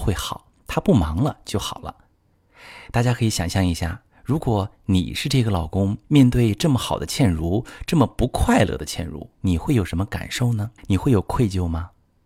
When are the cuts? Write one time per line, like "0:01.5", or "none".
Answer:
0:06.0
0:09.3
0:10.8